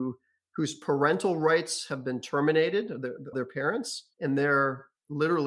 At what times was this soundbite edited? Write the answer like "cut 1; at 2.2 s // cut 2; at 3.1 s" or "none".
cut 1; at 3.3 s // cut 2; at 4.1 s